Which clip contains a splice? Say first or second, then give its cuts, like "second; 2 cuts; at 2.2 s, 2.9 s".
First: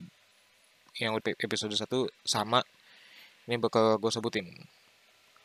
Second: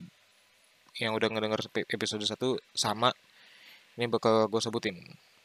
first; 1 cut; at 1.2 s